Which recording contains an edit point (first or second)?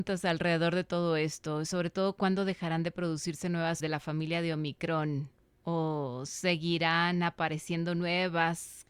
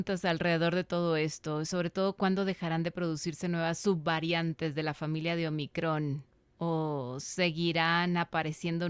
first